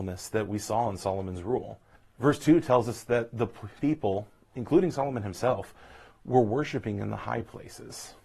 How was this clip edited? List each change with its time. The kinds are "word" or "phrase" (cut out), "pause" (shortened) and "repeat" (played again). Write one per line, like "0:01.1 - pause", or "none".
0:02.0 - pause